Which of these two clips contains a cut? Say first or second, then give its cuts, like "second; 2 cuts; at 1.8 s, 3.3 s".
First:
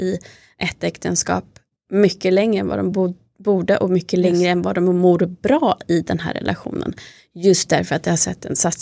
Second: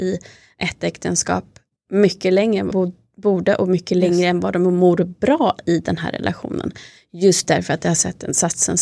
second; 1 cut; at 2.7 s